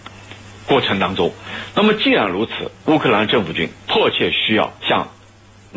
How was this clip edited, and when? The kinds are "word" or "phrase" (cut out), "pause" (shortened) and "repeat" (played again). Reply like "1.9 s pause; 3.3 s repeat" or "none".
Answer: 2.8 s pause; 4.8 s pause